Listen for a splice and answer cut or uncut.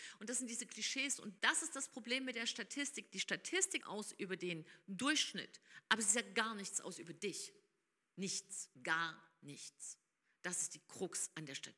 cut